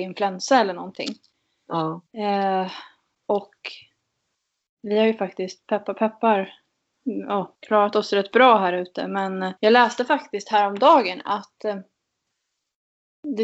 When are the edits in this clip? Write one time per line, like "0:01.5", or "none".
0:02.1
0:07.6
0:09.6